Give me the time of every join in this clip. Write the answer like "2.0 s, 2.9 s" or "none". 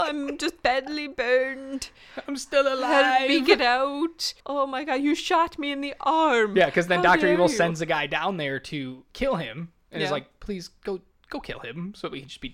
4.4 s